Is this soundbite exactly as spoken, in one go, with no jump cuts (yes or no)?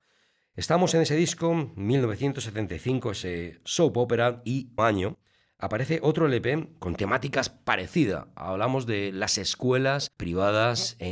no